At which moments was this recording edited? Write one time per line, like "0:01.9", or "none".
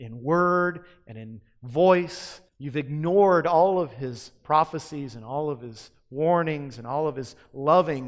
0:02.5